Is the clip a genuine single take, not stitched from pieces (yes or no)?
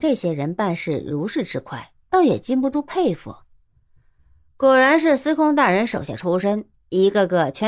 yes